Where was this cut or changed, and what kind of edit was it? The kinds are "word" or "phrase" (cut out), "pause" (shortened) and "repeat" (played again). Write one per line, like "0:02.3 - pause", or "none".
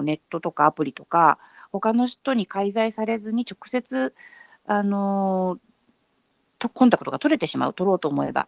none